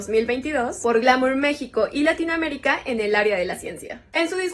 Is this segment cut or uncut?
uncut